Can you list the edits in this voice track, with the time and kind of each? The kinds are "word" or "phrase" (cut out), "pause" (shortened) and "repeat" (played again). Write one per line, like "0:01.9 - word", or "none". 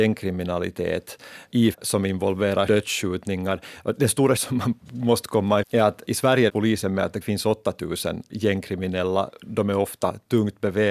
0:01.7 - word
0:02.7 - word
0:04.4 - word
0:05.6 - word
0:06.1 - word
0:06.5 - word
0:07.2 - word